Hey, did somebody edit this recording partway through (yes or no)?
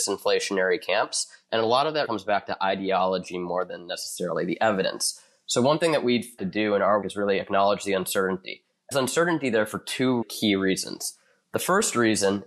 yes